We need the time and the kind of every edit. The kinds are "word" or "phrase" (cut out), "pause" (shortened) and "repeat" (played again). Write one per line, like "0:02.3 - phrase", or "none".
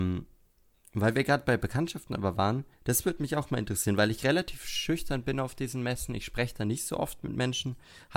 0:02.7 - pause

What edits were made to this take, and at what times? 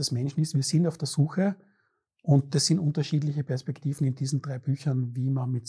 none

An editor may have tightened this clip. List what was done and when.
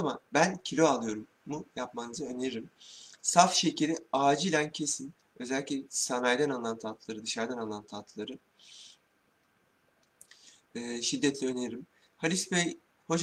none

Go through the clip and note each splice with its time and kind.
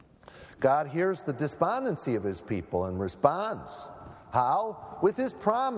none

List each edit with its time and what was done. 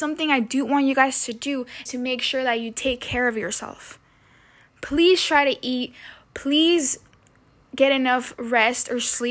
0:01.9 - word

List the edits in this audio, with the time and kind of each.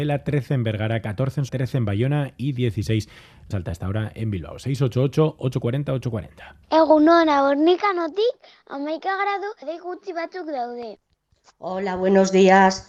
0:01.5 - word
0:03.5 - word
0:06.6 - pause
0:09.6 - word

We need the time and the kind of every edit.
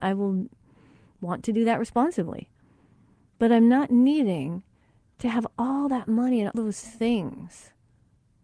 0:06.5 - word

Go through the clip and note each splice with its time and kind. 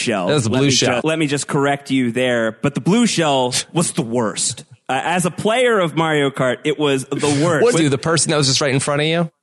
0:01.0 - word
0:07.7 - phrase

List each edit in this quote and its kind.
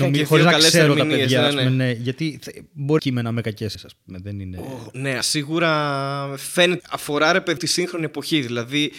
0:03.0 - phrase
0:03.7 - word
0:05.2 - word
0:06.8 - word
0:07.6 - word

